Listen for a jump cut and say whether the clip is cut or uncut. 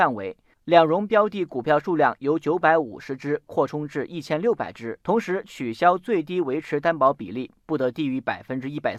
cut